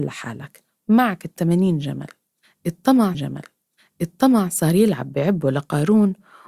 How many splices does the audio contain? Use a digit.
1